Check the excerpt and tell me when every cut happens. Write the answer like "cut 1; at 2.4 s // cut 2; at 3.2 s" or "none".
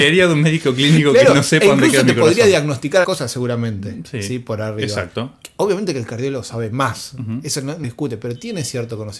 cut 1; at 3.0 s // cut 2; at 7.8 s